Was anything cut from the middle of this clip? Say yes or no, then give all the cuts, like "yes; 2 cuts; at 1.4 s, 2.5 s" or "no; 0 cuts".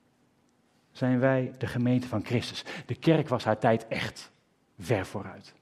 no; 0 cuts